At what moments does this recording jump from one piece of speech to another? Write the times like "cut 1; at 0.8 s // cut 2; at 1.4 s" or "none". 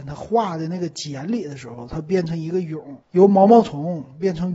cut 1; at 3.0 s